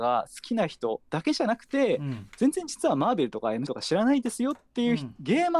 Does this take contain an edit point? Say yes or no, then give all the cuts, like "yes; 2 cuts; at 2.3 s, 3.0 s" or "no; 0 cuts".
yes; 1 cut; at 3.7 s